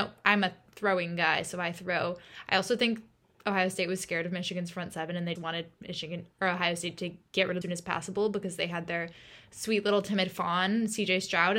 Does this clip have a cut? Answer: yes; 2 cuts; at 5.4 s, 7.6 s

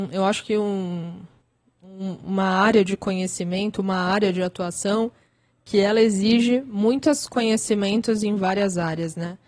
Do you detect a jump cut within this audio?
no; 0 cuts

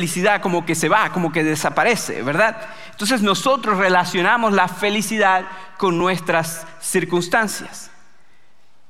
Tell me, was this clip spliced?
no; 0 cuts

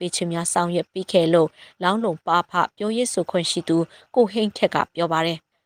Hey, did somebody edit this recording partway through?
no; 0 cuts

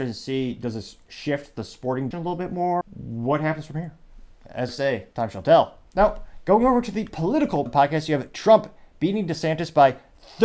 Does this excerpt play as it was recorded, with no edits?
no; 6 cuts; at 2.1 s, 2.8 s, 4.7 s, 5.1 s, 5.9 s, 7.7 s

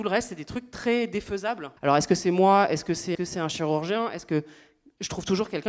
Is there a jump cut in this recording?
yes; 2 cuts; at 1.8 s, 3.1 s

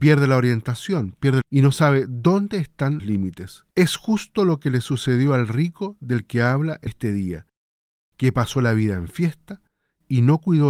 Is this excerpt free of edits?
no; 4 cuts; at 1.4 s, 3.0 s, 3.7 s, 6.9 s

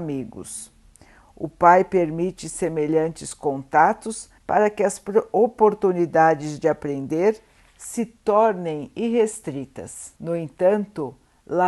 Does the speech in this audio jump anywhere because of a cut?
yes; 2 cuts; at 4.4 s, 10.2 s

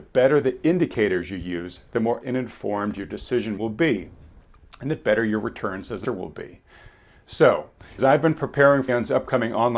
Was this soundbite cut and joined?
yes; 5 cuts; at 2.2 s, 3.6 s, 6.0 s, 8.0 s, 8.9 s

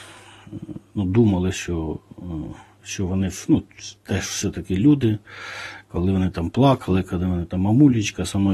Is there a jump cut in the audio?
no; 0 cuts

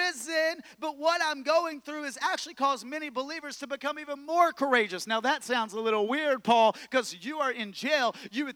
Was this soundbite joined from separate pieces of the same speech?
no; 0 cuts

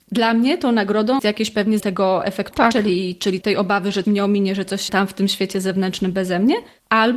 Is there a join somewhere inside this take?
yes; 6 cuts; at 1.2 s, 1.8 s, 2.5 s, 3.4 s, 4.0 s, 4.9 s

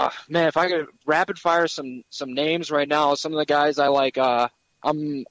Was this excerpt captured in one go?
yes; 0 cuts

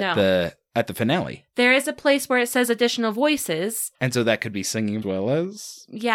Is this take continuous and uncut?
no; 2 cuts; at 3.9 s, 5.0 s

